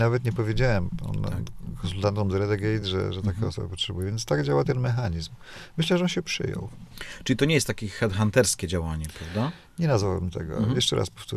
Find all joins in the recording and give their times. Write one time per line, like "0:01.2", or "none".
none